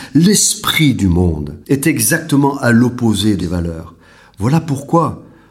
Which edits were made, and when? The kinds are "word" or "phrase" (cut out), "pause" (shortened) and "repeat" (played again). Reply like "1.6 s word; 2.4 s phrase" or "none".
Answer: 1.6 s pause; 3.4 s word